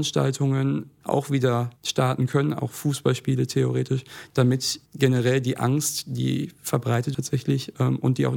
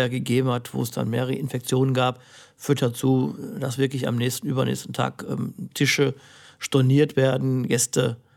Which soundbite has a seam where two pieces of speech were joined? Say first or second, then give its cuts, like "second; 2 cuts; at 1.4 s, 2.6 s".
first; 4 cuts; at 1.0 s, 1.8 s, 4.9 s, 7.1 s